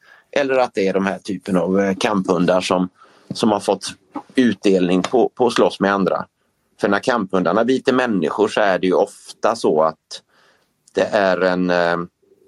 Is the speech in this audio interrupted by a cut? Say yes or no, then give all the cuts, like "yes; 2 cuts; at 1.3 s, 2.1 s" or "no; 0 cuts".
no; 0 cuts